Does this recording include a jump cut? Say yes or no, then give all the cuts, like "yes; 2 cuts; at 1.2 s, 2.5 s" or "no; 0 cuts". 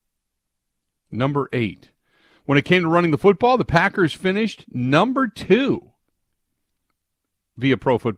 no; 0 cuts